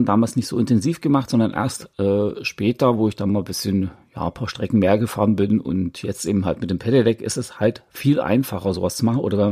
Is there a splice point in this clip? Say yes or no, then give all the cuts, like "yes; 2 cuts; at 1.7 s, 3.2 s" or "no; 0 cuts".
no; 0 cuts